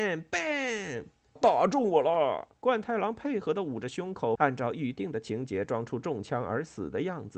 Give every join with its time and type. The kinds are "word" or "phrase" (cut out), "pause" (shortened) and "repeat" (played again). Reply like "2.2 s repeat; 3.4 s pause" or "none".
1.4 s word; 2.6 s pause; 4.4 s phrase